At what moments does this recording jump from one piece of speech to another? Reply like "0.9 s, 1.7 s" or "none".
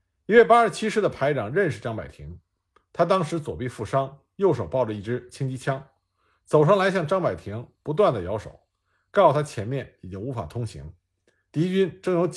none